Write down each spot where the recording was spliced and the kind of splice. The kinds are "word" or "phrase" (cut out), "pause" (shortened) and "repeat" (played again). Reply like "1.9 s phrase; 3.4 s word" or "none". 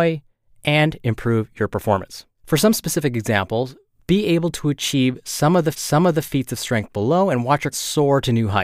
2.4 s pause; 5.7 s repeat; 7.7 s word